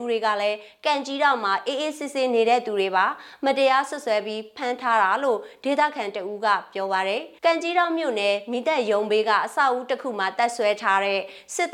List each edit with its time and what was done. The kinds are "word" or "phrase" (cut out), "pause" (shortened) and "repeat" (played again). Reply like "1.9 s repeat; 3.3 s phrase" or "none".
7.4 s pause